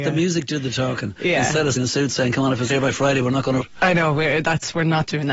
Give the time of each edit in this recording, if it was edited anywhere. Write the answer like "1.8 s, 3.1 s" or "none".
1.8 s, 2.7 s, 3.6 s